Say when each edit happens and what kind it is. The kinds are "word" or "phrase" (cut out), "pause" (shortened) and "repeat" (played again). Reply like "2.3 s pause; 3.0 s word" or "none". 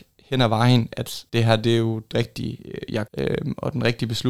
1.3 s pause; 2.1 s phrase; 3.1 s word